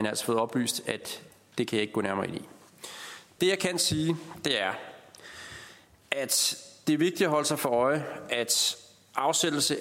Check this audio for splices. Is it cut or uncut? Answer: uncut